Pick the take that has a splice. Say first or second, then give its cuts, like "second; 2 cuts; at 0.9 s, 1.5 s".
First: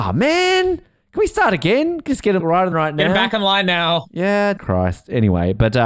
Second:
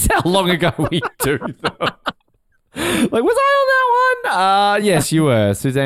first; 4 cuts; at 2.1 s, 2.4 s, 2.7 s, 4.6 s